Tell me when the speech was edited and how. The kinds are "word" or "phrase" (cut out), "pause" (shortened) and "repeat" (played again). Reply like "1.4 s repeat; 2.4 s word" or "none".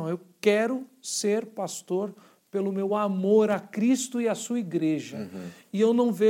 none